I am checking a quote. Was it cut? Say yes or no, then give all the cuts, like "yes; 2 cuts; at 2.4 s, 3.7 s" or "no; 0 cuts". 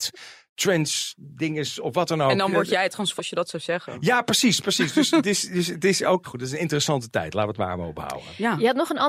yes; 2 cuts; at 3.2 s, 6.2 s